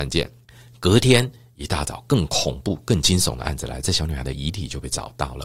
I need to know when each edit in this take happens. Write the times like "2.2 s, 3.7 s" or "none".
none

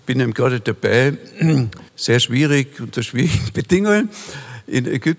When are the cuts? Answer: 1.9 s

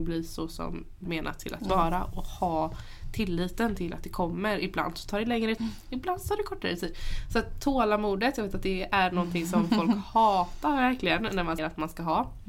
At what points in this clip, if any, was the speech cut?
1.0 s, 5.6 s, 11.6 s

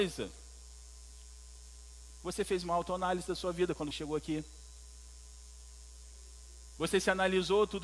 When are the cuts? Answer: 3.9 s

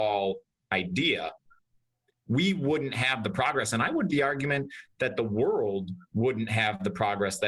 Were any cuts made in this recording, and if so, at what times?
4.1 s

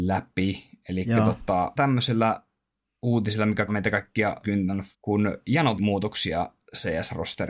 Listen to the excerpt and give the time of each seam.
1.8 s, 3.7 s, 4.4 s, 4.9 s, 5.8 s

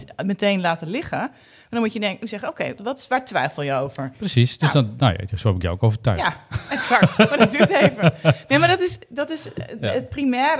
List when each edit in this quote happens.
2.8 s

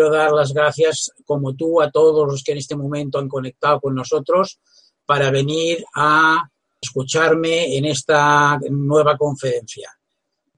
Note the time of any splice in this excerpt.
6.8 s

